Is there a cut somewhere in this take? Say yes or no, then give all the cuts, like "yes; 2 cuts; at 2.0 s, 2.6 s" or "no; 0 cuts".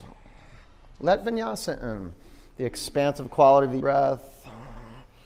yes; 1 cut; at 3.8 s